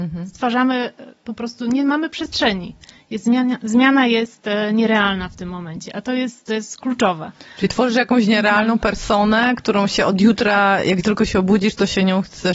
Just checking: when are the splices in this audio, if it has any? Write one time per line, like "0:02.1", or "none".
none